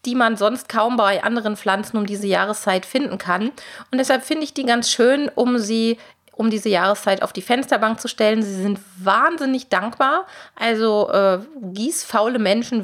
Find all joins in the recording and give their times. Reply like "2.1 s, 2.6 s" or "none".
none